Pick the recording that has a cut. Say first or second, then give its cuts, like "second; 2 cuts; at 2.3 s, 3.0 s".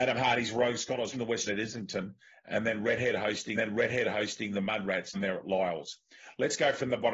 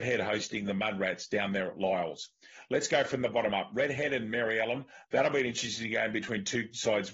first; 4 cuts; at 1.1 s, 1.5 s, 3.6 s, 5.1 s